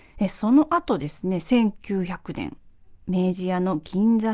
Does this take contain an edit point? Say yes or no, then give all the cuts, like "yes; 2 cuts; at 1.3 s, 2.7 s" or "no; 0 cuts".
yes; 1 cut; at 3.0 s